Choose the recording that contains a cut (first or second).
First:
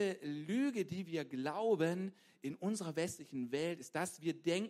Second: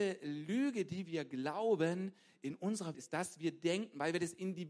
second